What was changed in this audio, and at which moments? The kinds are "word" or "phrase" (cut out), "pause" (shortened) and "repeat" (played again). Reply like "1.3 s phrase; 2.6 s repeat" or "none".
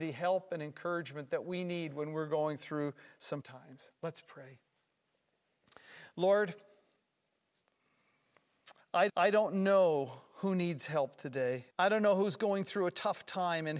3.4 s word; 9.1 s repeat; 11.7 s pause